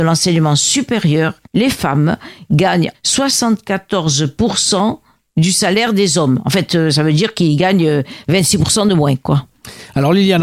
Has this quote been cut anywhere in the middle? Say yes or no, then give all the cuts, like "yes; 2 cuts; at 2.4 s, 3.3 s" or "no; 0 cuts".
yes; 2 cuts; at 1.5 s, 2.9 s